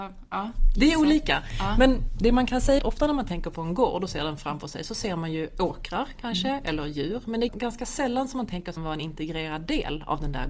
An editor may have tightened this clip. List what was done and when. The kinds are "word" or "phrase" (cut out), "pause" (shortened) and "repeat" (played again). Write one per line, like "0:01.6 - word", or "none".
0:02.8 - word
0:07.5 - word
0:08.8 - phrase